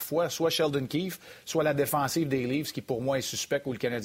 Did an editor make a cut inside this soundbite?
no; 0 cuts

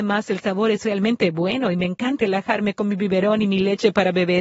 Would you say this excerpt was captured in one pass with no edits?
no; 1 cut; at 2.2 s

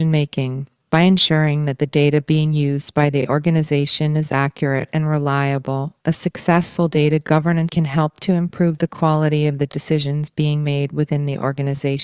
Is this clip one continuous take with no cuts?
no; 1 cut; at 7.7 s

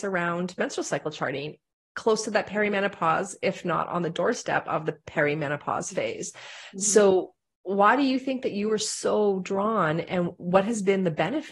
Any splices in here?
no; 0 cuts

